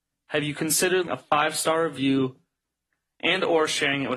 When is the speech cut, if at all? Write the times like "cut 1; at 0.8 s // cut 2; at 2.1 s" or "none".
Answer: cut 1; at 1.1 s